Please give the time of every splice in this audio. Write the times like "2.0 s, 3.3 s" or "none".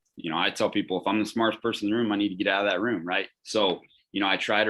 3.4 s